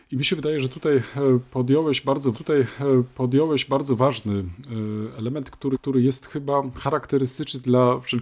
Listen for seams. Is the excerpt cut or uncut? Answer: cut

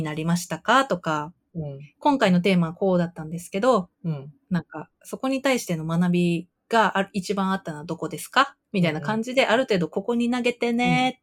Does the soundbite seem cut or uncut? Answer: cut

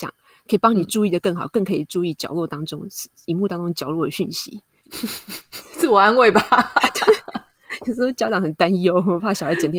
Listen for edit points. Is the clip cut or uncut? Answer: uncut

